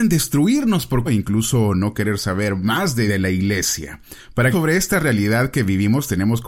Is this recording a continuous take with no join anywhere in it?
no; 3 cuts; at 1.1 s, 3.1 s, 4.5 s

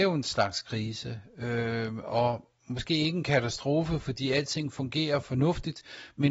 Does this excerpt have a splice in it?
no; 0 cuts

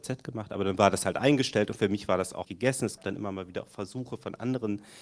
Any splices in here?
yes; 2 cuts; at 2.4 s, 3.0 s

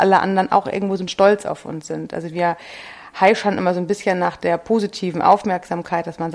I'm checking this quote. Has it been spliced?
yes; 1 cut; at 1.1 s

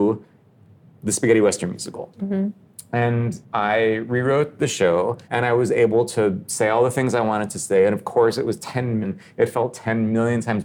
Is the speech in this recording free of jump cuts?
no; 3 cuts; at 3.4 s, 5.2 s, 9.0 s

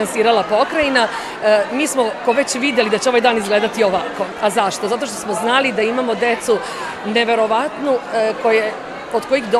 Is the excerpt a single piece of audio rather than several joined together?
no; 1 cut; at 2.2 s

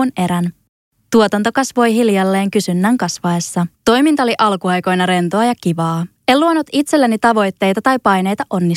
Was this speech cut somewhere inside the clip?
yes; 2 cuts; at 3.7 s, 6.2 s

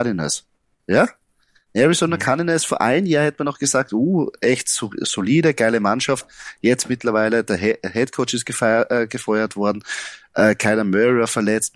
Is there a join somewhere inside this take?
no; 0 cuts

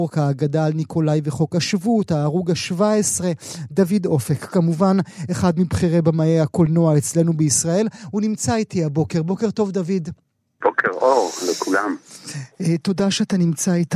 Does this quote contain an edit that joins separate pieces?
no; 0 cuts

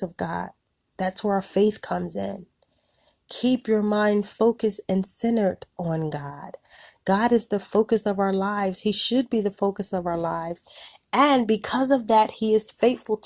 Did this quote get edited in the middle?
no; 0 cuts

